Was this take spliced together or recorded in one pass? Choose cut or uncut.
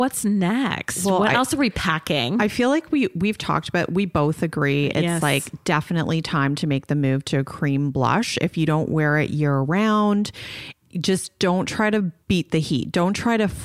cut